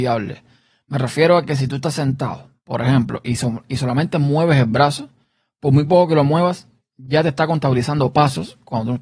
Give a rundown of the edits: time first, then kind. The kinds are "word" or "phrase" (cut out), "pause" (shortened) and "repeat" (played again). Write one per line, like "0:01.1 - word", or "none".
none